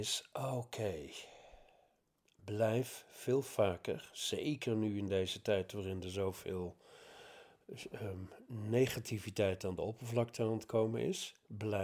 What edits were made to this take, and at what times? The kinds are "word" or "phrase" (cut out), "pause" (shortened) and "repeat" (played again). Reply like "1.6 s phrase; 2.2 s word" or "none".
none